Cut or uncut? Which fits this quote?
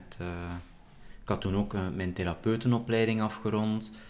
uncut